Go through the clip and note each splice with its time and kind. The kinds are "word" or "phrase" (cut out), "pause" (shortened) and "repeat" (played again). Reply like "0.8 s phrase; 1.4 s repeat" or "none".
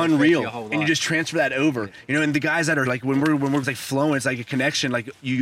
2.9 s word; 3.6 s word